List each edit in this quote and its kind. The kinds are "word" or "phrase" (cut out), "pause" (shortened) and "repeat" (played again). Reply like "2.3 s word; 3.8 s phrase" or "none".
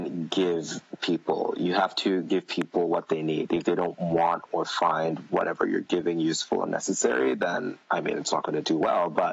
7.8 s pause